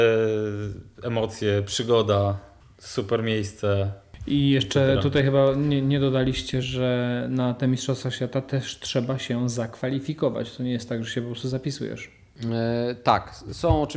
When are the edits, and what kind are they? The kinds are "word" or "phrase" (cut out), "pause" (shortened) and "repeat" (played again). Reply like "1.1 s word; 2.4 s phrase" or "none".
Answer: none